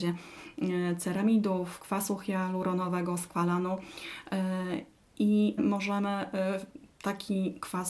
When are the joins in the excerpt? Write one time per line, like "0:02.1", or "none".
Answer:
0:05.6